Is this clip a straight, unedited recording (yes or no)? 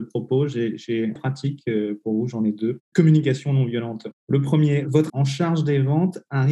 no